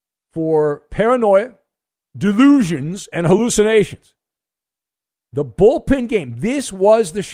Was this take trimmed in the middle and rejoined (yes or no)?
no